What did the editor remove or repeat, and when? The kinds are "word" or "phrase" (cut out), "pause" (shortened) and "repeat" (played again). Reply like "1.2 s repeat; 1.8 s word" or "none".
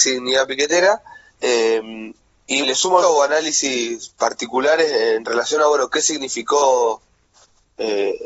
1.3 s pause; 2.6 s word; 3.0 s phrase